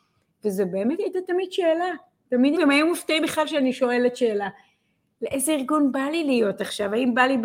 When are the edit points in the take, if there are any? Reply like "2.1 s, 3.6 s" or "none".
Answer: 2.6 s

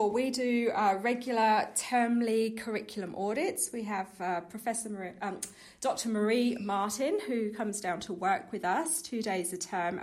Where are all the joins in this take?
none

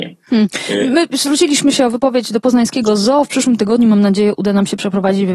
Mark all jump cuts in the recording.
none

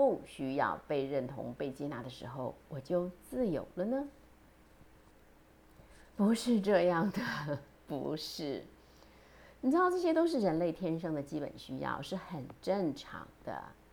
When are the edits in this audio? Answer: 6.1 s

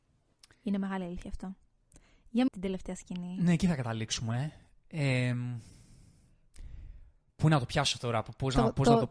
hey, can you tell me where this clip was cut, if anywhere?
2.5 s

